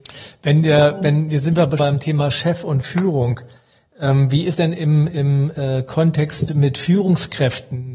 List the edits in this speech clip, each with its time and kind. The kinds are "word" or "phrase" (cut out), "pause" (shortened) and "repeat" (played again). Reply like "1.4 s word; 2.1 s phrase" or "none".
1.8 s word; 4.5 s word; 6.5 s word